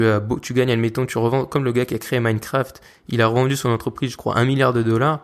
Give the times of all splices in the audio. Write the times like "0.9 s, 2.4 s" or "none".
none